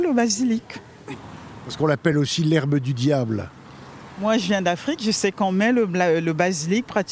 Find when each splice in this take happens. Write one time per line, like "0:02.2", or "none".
none